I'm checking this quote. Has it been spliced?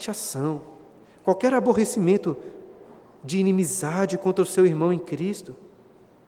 no; 0 cuts

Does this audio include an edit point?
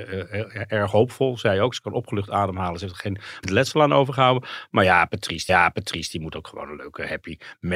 yes; 2 cuts; at 3.4 s, 5.5 s

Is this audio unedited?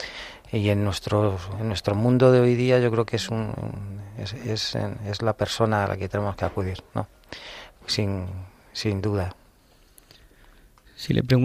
yes; 0 cuts

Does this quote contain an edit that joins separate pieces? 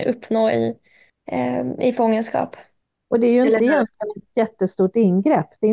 no; 0 cuts

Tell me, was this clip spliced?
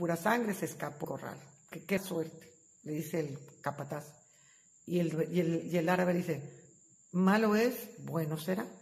yes; 2 cuts; at 1.0 s, 2.0 s

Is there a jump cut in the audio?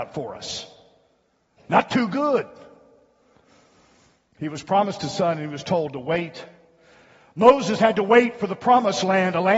no; 0 cuts

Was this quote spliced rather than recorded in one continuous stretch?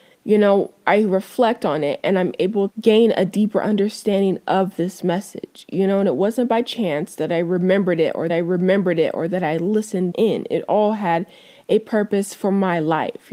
yes; 3 cuts; at 2.7 s, 8.3 s, 10.1 s

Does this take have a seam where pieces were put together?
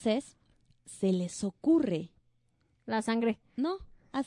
no; 0 cuts

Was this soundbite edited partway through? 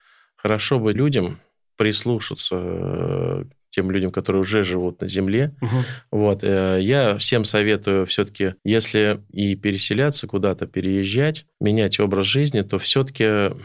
yes; 3 cuts; at 0.9 s, 8.6 s, 11.5 s

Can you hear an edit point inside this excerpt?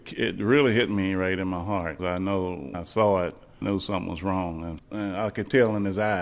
yes; 4 cuts; at 2.0 s, 2.7 s, 3.6 s, 4.8 s

